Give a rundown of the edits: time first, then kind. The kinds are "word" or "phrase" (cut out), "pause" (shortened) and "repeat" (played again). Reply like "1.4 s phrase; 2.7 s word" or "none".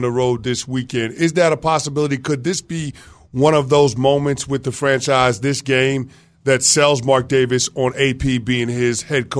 none

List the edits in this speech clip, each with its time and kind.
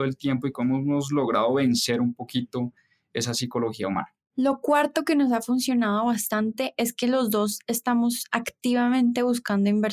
none

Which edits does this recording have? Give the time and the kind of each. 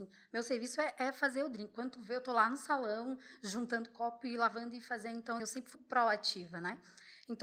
5.4 s word; 5.7 s word

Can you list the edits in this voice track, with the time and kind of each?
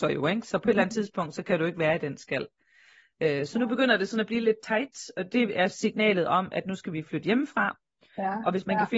none

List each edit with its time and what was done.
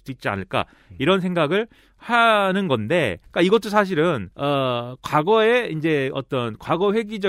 3.2 s pause; 4.3 s pause

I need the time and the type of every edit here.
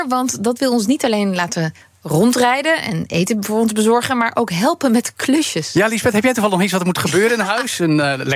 none

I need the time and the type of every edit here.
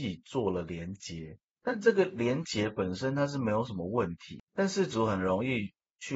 1.5 s pause; 4.4 s pause

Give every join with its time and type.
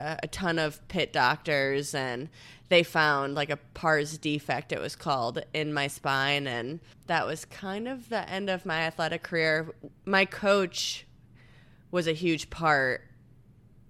6.9 s pause; 9.9 s pause

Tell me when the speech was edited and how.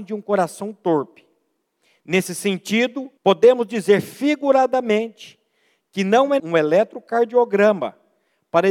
3.2 s pause; 6.4 s word

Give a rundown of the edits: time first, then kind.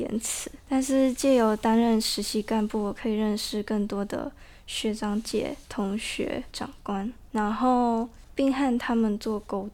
6.5 s phrase

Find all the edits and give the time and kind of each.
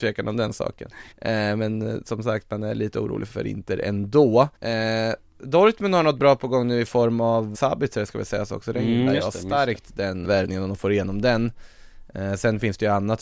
1.1 s pause; 3.3 s word; 4.6 s pause; 7.5 s word; 10.2 s word

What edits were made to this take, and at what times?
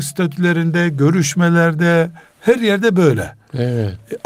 none

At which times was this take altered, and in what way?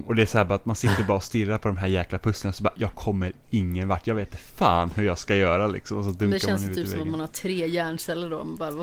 4.5 s pause

